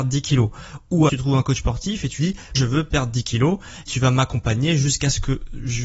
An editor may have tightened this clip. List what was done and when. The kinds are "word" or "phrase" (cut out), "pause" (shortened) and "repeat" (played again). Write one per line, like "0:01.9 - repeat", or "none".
0:01.1 - word
0:02.2 - word
0:02.5 - word
0:03.9 - word